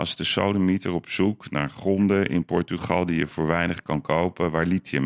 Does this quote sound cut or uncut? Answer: uncut